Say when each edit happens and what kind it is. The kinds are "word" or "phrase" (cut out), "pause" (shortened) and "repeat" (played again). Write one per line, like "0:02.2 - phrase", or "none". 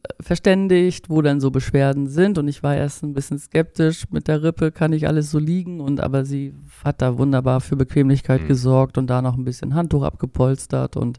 none